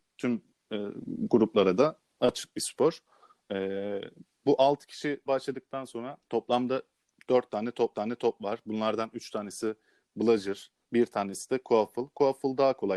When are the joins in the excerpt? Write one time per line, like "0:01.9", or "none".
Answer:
0:05.3
0:06.2
0:07.9
0:10.8